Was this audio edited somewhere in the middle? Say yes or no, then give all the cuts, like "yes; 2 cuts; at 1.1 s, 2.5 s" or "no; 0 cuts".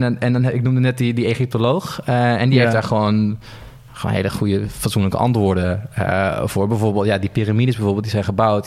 no; 0 cuts